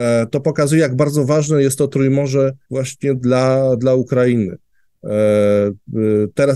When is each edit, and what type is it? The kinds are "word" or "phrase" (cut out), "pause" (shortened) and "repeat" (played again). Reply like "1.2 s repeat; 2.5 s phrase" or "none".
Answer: 2.6 s pause

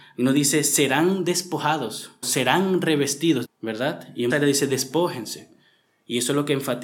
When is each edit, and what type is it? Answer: 2.2 s word; 3.4 s phrase; 4.3 s word

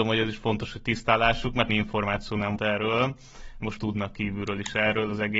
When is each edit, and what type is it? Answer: 1.7 s phrase; 2.6 s word; 3.8 s phrase

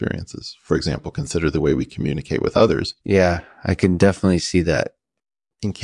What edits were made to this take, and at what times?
3.0 s pause

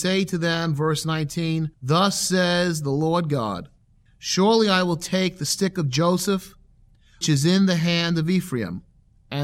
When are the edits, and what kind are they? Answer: 1.7 s pause; 3.8 s pause; 7.2 s word

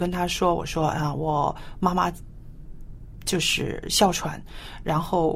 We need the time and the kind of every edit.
none

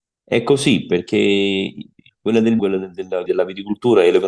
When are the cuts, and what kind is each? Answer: 2.6 s word; 3.3 s word

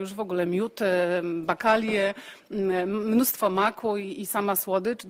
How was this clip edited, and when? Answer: none

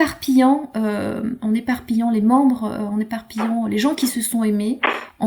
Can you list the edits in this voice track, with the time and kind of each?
none

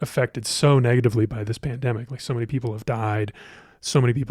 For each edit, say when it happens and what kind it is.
none

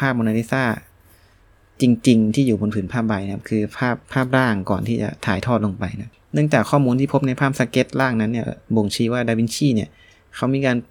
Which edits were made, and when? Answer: 4.0 s pause; 8.6 s pause

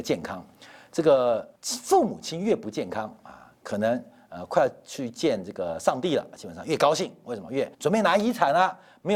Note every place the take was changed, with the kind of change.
1.6 s pause; 7.7 s pause

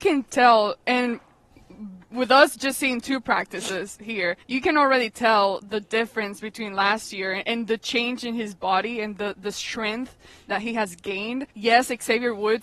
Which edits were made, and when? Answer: 4.4 s pause; 11.5 s pause

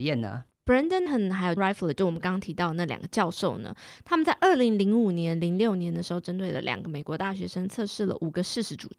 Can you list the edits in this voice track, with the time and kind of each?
1.1 s word; 1.6 s word

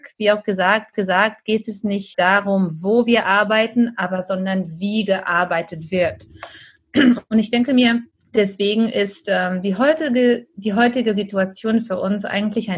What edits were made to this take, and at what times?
0.9 s repeat; 2.1 s word; 8.1 s pause

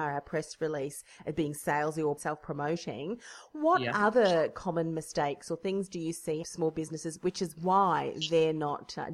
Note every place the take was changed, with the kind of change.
2.2 s word; 6.4 s phrase

